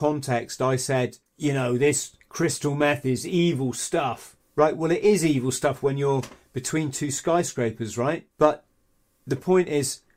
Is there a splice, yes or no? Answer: yes